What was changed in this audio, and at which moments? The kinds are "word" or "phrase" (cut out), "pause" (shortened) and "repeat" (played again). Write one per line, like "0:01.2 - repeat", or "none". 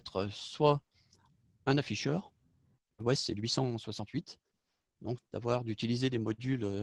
0:05.2 - phrase